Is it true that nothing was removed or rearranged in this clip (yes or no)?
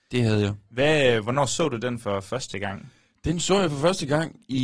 yes